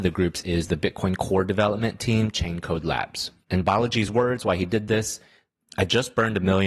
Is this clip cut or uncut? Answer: uncut